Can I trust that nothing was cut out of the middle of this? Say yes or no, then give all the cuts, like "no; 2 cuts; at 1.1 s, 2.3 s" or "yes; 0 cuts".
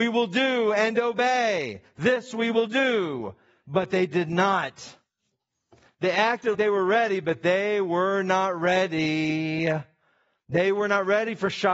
no; 1 cut; at 6.5 s